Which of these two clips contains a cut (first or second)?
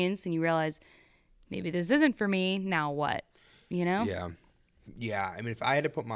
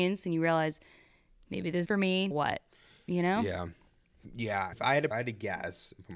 second